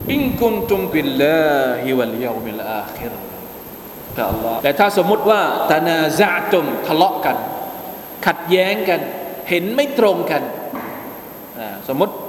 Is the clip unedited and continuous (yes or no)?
no